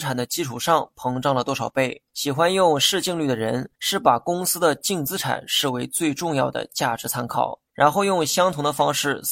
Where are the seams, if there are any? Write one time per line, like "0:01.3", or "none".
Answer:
0:02.1
0:03.8
0:07.7